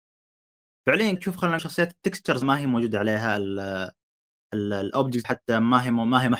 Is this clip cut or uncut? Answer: cut